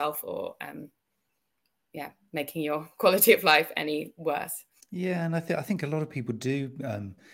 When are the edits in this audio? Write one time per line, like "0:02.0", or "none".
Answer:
0:04.8